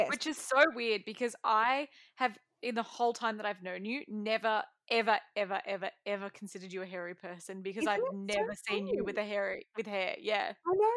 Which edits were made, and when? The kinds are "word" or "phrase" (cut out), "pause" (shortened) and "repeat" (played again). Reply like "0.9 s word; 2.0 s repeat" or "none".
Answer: none